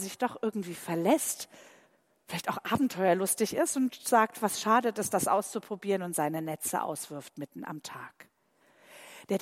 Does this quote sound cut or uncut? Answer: uncut